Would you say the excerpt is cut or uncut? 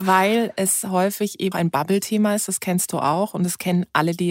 cut